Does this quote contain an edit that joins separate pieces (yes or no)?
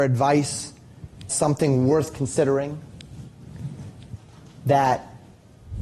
yes